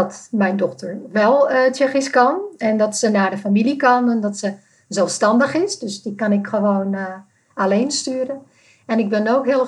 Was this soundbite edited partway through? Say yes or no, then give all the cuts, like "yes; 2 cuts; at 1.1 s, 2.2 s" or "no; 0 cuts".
no; 0 cuts